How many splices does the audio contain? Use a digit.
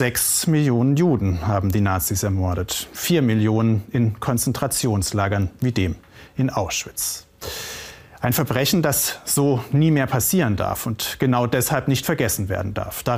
0